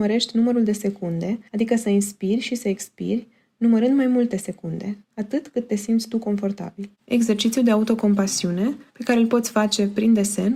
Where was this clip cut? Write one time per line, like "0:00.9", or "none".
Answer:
0:01.5
0:05.0
0:06.9
0:08.9